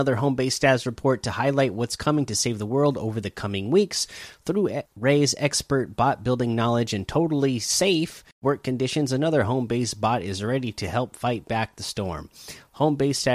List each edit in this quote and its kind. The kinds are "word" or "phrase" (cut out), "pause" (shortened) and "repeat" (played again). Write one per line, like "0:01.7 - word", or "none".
0:04.9 - pause
0:08.3 - pause